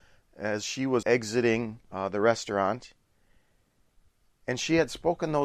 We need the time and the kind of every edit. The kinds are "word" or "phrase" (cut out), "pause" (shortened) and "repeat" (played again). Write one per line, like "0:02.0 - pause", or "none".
0:01.0 - word
0:01.8 - pause